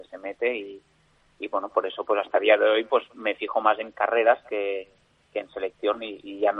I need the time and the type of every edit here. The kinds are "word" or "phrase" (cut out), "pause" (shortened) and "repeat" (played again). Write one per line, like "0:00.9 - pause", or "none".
none